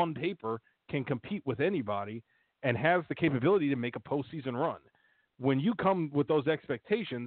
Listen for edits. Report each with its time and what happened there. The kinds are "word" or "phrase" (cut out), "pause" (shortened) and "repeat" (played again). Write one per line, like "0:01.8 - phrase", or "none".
none